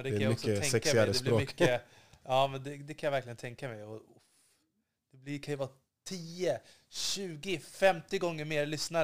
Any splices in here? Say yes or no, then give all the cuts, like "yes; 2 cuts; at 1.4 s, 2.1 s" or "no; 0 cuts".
no; 0 cuts